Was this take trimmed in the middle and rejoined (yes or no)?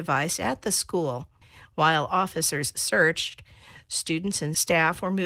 no